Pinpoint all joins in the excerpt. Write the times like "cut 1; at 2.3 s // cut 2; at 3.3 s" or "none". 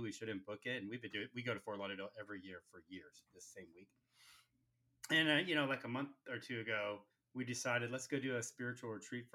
cut 1; at 7.1 s